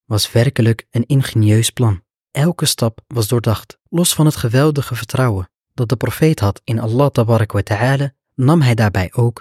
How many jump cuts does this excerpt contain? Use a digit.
2